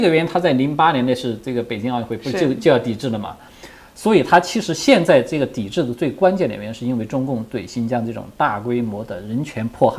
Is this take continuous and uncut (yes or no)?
yes